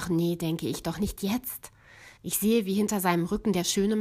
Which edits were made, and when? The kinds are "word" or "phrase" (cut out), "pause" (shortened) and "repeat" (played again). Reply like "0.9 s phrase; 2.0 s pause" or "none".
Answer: 2.2 s pause